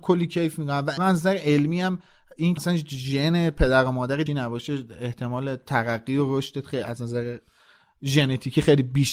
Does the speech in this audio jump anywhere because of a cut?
yes; 3 cuts; at 1.0 s, 2.6 s, 4.3 s

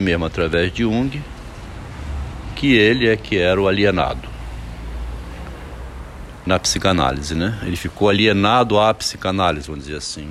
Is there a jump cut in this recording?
no; 0 cuts

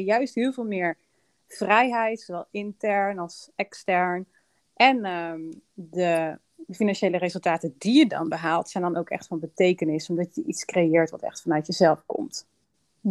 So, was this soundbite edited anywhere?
no; 0 cuts

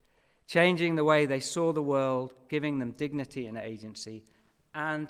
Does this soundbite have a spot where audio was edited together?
no; 0 cuts

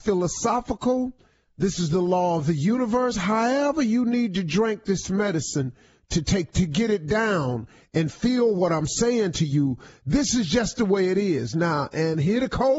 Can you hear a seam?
no; 0 cuts

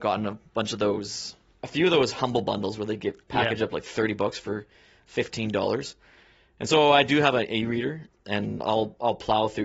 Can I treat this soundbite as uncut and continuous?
yes; 0 cuts

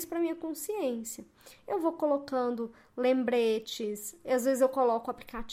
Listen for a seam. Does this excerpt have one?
no; 0 cuts

